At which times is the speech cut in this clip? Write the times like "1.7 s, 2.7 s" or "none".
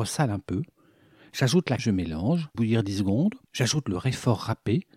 1.8 s, 2.5 s, 3.5 s

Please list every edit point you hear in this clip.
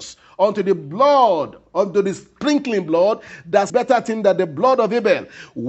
3.7 s

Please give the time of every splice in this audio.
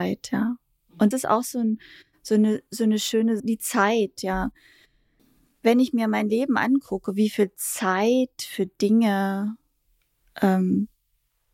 1.1 s, 3.4 s

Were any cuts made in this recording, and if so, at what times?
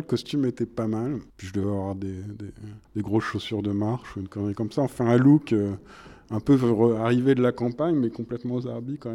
1.3 s, 2.8 s

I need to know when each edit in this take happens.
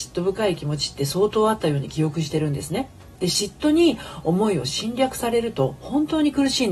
3.1 s

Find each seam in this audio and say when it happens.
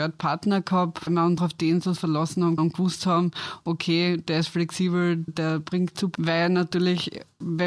1.1 s, 1.4 s, 2.0 s, 2.6 s, 5.3 s, 6.1 s

